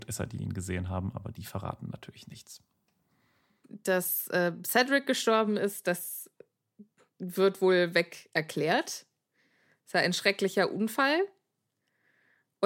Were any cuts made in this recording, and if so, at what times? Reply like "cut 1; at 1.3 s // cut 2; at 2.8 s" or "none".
none

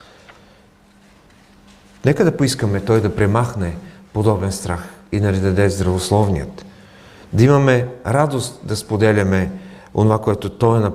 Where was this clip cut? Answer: none

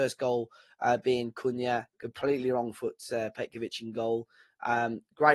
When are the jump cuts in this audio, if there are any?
none

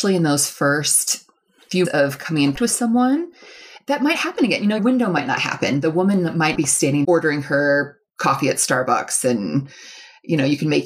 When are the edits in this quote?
cut 1; at 1.8 s // cut 2; at 2.5 s // cut 3; at 4.1 s // cut 4; at 4.8 s // cut 5; at 6.5 s // cut 6; at 7.0 s

